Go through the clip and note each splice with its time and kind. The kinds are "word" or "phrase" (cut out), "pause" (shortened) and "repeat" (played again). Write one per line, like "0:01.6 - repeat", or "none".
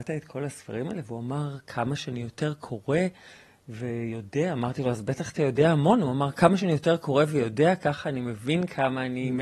none